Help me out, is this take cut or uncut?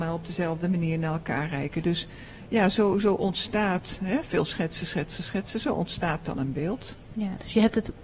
uncut